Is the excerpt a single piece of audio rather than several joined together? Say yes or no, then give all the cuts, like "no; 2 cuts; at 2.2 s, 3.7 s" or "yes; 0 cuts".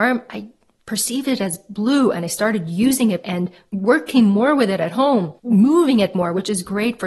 no; 1 cut; at 3.2 s